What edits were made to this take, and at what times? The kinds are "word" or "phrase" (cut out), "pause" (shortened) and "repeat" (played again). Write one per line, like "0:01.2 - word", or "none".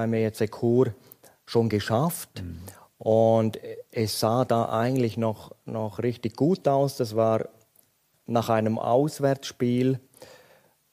none